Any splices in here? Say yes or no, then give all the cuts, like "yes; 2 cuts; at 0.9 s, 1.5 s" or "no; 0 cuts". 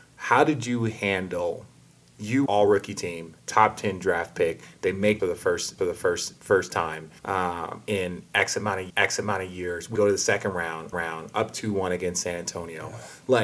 yes; 8 cuts; at 2.5 s, 3.4 s, 5.2 s, 5.8 s, 7.2 s, 8.9 s, 9.9 s, 10.9 s